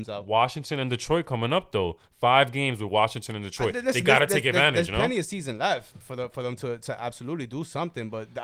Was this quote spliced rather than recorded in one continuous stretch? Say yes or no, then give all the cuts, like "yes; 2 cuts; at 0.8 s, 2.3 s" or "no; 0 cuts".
no; 0 cuts